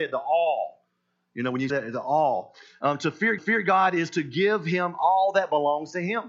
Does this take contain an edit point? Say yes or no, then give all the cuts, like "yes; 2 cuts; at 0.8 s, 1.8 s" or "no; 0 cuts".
yes; 2 cuts; at 1.7 s, 3.4 s